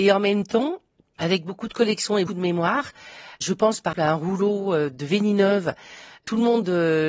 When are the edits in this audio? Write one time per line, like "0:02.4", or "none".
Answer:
0:02.3
0:03.9